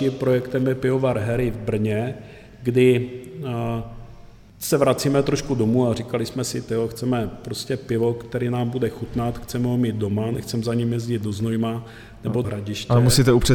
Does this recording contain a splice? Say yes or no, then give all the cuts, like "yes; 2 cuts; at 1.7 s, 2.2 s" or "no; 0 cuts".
yes; 1 cut; at 12.4 s